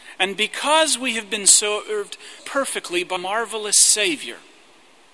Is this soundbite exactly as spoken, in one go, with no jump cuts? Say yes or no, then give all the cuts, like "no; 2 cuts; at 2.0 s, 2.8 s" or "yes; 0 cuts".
no; 2 cuts; at 2.4 s, 3.2 s